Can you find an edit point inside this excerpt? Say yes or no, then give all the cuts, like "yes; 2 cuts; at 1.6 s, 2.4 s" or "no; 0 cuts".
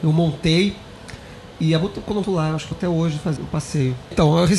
yes; 3 cuts; at 2.2 s, 2.7 s, 3.4 s